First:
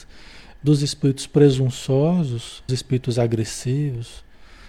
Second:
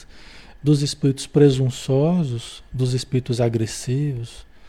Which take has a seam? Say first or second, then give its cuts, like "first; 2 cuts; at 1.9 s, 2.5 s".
first; 1 cut; at 2.7 s